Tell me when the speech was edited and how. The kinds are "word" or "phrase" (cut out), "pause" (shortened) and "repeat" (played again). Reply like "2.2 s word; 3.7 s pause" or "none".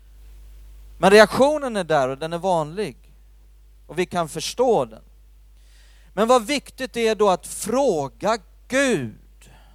none